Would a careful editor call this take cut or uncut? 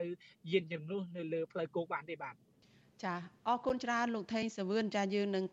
cut